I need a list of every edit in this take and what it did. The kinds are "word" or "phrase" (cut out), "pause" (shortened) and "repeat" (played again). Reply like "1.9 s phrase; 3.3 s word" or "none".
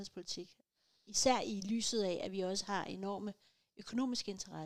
none